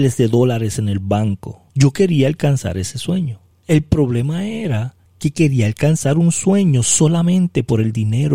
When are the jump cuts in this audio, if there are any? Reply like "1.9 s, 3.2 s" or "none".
1.7 s, 3.5 s, 5.1 s